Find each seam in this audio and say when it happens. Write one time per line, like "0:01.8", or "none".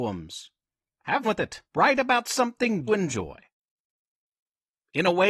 0:01.2
0:01.7
0:02.9

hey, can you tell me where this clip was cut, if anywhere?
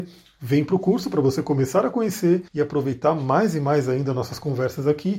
0:02.5

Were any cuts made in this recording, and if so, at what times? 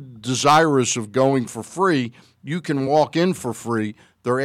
none

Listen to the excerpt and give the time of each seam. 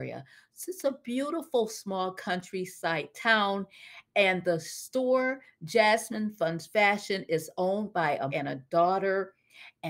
0:08.3

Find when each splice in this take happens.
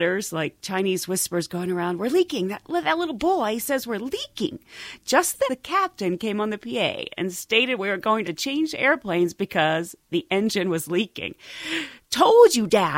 0:02.6
0:05.5
0:08.2

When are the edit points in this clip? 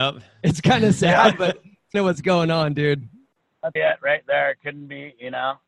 0:01.9
0:03.8

